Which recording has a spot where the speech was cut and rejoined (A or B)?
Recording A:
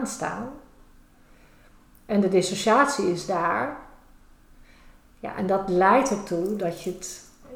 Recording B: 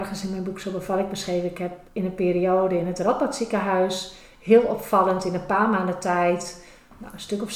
B